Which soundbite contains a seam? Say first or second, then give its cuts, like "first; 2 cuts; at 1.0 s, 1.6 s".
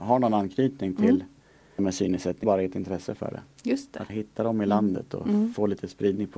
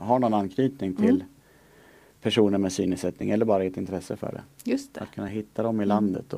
first; 3 cuts; at 1.8 s, 2.4 s, 4.1 s